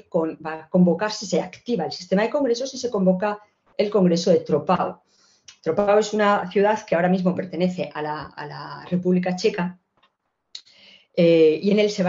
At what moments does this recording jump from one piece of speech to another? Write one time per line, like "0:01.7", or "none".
none